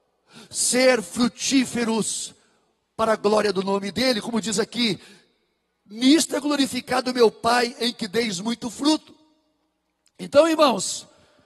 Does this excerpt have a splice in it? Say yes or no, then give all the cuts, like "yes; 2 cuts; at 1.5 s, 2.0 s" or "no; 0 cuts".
no; 0 cuts